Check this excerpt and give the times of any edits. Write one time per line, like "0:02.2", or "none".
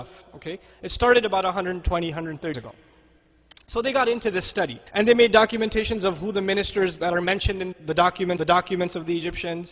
0:02.5
0:04.9
0:07.7
0:08.4